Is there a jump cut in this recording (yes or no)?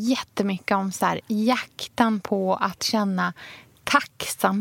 no